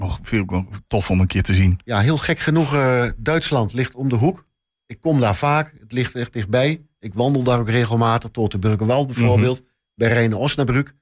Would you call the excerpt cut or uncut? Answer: uncut